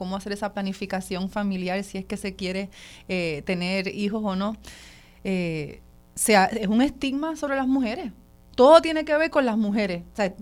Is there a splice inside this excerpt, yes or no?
no